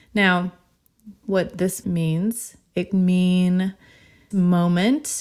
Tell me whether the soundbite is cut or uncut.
cut